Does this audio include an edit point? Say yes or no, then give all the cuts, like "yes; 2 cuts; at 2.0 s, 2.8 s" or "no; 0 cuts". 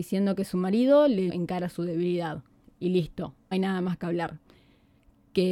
yes; 2 cuts; at 1.3 s, 3.5 s